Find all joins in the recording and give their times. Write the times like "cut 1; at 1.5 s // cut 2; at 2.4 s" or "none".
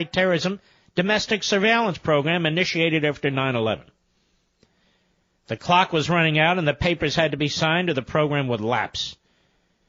none